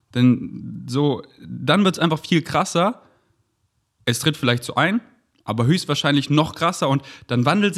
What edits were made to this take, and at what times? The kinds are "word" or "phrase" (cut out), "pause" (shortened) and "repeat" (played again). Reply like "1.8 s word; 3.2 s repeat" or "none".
none